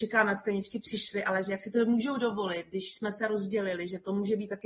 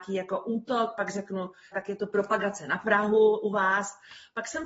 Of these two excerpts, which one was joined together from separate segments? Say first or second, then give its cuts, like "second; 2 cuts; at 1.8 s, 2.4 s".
second; 1 cut; at 1.7 s